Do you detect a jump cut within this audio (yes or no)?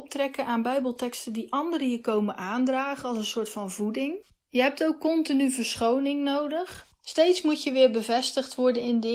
no